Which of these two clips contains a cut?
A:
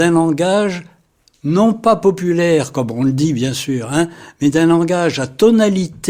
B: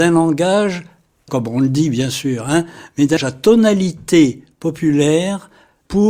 B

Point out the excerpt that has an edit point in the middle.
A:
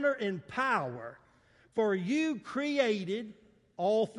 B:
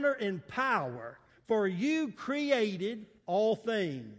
B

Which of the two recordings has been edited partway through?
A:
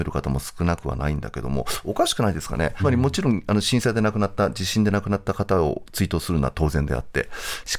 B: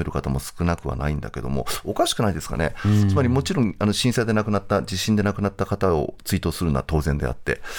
A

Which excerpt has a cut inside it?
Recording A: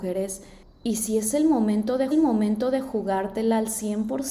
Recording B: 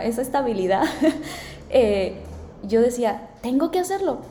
A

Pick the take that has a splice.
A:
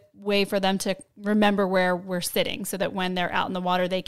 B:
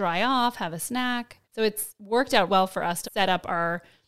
B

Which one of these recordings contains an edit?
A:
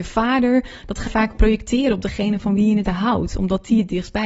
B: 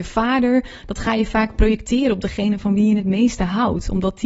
A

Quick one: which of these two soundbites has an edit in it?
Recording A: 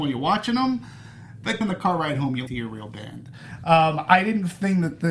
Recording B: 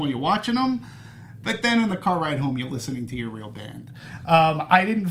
A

